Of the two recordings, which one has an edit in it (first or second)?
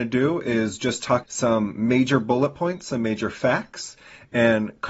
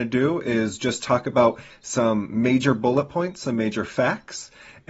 first